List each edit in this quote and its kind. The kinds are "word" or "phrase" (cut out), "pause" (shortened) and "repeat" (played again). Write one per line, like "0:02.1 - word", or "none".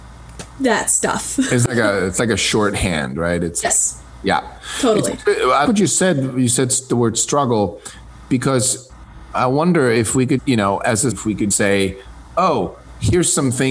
0:03.6 - word
0:05.6 - word
0:10.4 - word
0:11.1 - word
0:11.5 - word

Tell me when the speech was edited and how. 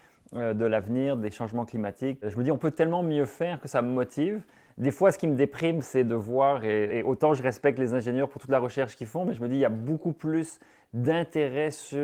0:06.9 - word

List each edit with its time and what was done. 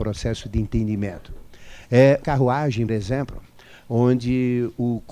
0:02.2 - word
0:02.9 - word

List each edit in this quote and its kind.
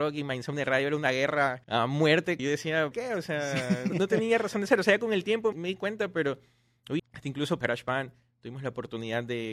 0:01.6 - pause
0:02.4 - word
0:02.9 - word
0:03.9 - word
0:05.5 - word
0:07.0 - phrase
0:07.6 - phrase

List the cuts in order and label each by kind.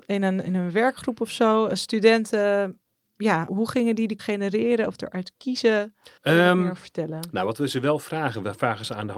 0:03.5 - word
0:04.2 - word
0:06.2 - pause

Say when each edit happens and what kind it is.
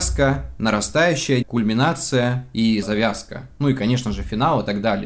0:01.4 - word
0:02.8 - phrase

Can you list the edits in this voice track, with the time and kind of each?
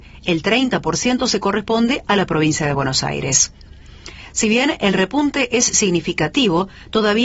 none

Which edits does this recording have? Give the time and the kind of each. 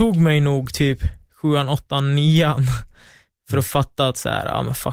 none

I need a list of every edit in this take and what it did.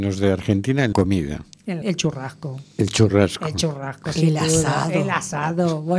0:00.9 - word
0:01.8 - word

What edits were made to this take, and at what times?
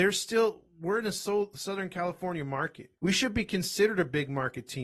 0:03.0 - pause

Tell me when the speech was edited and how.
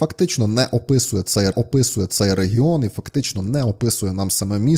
0:01.5 - repeat

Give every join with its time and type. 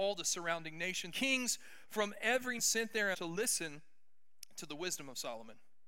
0:01.1 - word
0:02.6 - word
0:03.1 - word

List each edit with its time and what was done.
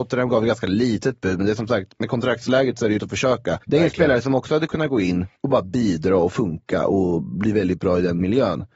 0:03.0 - word
0:03.6 - pause
0:05.4 - pause

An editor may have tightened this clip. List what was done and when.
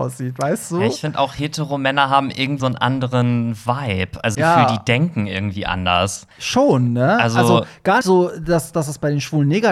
0:02.6 - word
0:04.3 - phrase
0:06.3 - pause
0:08.0 - word

